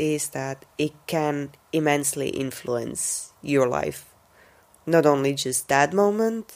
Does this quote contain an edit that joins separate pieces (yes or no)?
no